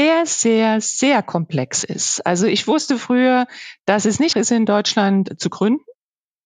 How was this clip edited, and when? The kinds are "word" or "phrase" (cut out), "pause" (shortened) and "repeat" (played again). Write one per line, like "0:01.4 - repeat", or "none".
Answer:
0:04.3 - word